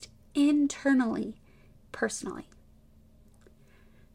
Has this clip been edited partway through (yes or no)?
yes